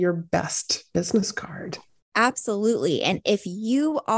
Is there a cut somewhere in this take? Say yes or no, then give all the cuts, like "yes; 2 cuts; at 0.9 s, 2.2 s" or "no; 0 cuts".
no; 0 cuts